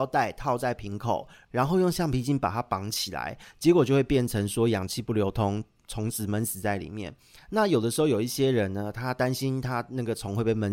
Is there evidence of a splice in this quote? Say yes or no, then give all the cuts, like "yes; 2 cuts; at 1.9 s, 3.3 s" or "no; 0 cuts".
no; 0 cuts